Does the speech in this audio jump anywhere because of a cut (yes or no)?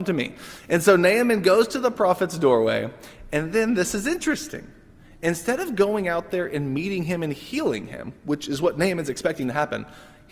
no